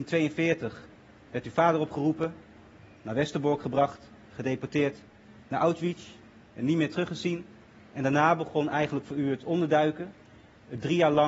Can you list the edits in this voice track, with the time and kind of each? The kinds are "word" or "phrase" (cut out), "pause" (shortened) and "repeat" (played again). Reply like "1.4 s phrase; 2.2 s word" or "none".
none